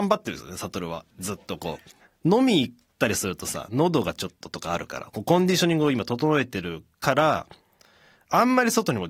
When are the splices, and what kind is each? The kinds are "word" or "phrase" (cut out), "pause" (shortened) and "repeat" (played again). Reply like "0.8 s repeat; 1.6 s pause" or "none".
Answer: 2.0 s pause